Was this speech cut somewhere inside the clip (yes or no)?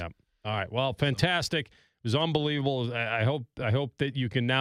no